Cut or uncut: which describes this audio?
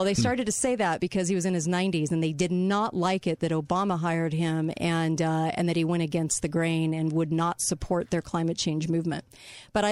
uncut